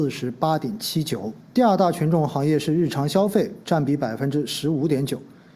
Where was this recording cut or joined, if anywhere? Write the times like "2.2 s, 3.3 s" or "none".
1.4 s